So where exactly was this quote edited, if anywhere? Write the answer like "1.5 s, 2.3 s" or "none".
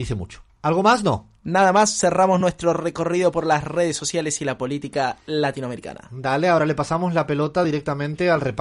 none